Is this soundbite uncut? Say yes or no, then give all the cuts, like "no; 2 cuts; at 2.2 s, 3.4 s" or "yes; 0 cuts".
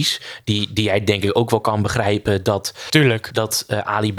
yes; 0 cuts